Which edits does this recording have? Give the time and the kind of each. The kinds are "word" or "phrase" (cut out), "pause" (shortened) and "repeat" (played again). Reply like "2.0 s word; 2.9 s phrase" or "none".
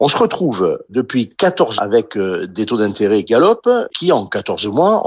1.8 s word; 3.2 s word; 3.9 s word